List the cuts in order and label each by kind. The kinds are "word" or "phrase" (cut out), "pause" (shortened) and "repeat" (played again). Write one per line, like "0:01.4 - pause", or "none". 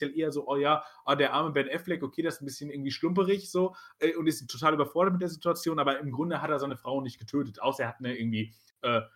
none